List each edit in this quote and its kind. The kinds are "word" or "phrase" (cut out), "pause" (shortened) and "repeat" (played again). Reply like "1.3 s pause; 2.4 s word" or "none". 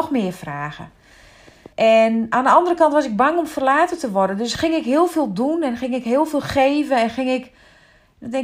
1.7 s pause